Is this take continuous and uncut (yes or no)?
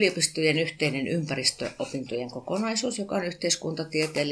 yes